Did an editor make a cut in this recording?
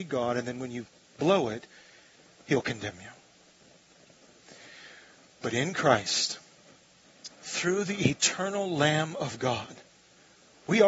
no; 0 cuts

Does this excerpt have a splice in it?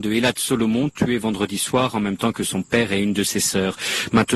no; 0 cuts

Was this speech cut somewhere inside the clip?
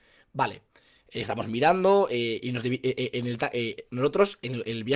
yes; 1 cut; at 3.9 s

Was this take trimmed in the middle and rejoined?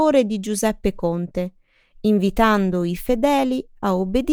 no; 0 cuts

